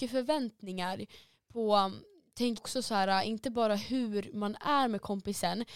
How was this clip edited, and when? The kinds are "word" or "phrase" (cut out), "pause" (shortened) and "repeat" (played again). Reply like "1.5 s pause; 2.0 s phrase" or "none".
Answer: 2.6 s word